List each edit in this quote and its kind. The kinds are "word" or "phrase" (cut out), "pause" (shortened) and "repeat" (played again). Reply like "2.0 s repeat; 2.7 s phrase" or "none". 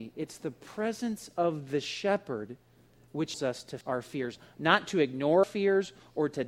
3.3 s word; 3.8 s word; 5.4 s word